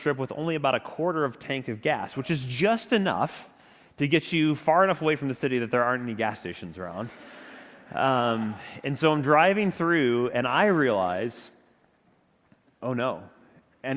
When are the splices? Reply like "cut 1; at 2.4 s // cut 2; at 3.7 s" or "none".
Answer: none